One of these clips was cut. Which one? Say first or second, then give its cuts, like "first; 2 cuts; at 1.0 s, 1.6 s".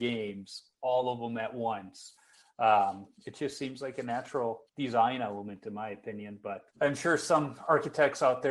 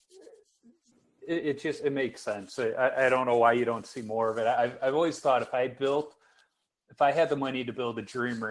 first; 3 cuts; at 3.2 s, 4.7 s, 6.7 s